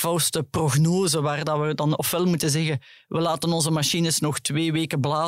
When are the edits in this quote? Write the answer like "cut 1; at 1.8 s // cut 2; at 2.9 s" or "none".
none